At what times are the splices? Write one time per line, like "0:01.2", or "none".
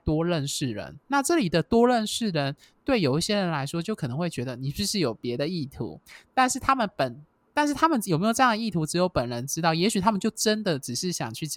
none